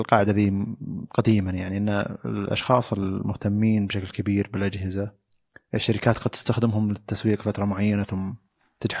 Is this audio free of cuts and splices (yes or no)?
yes